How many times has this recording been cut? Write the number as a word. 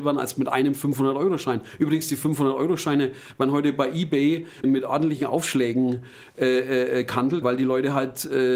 two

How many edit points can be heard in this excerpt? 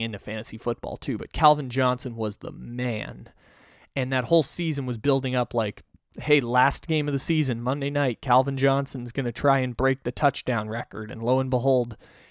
zero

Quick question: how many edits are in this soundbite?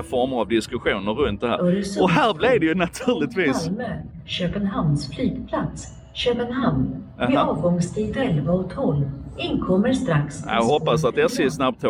zero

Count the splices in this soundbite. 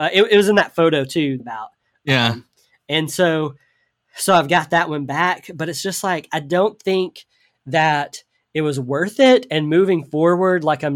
one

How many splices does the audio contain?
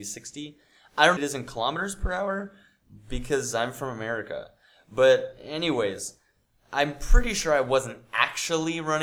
one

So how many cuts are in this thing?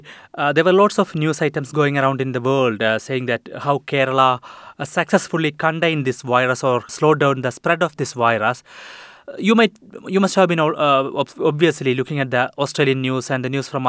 one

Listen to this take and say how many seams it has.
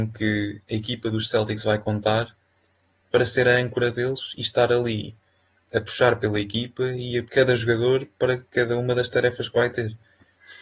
one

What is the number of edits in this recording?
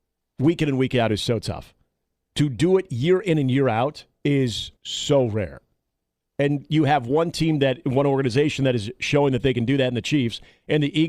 one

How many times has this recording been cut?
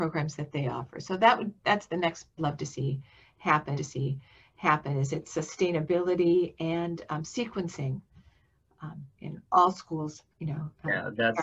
five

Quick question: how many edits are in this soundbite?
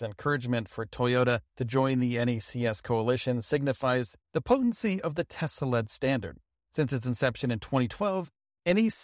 three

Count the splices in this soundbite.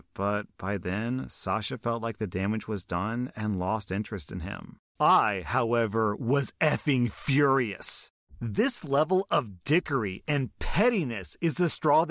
zero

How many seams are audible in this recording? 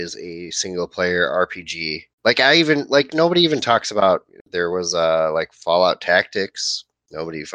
one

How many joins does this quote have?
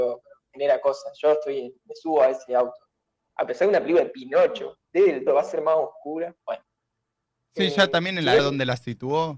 two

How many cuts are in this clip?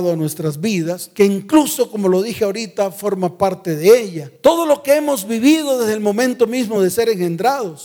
zero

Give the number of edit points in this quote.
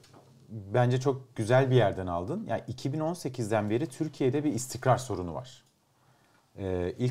zero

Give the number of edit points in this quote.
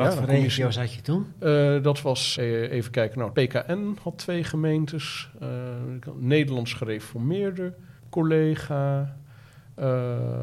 three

